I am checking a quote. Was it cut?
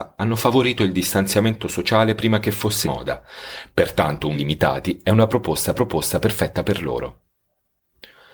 yes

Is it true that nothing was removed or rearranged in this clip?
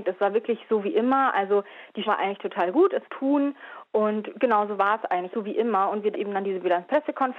no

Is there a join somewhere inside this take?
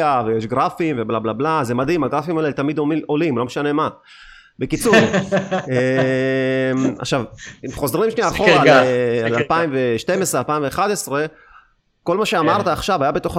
no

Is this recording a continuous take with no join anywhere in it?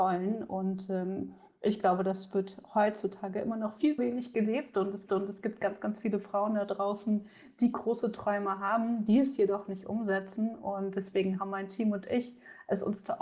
no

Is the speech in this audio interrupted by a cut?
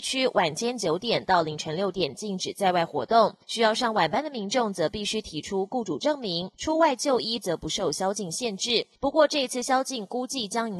yes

